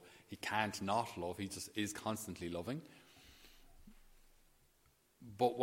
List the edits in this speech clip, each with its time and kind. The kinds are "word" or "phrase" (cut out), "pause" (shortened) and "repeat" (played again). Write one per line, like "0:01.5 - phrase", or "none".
none